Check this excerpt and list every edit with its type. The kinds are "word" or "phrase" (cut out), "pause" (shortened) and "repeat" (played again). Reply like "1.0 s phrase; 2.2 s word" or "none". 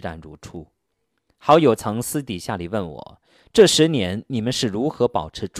none